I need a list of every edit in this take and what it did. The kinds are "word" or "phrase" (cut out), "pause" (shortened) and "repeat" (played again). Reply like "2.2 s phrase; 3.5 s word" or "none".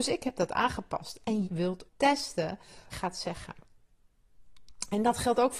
1.4 s word; 1.9 s word; 2.9 s phrase